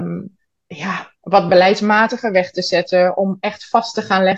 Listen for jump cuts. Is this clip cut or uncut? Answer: cut